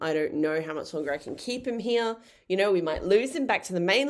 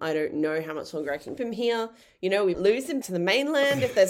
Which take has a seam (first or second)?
second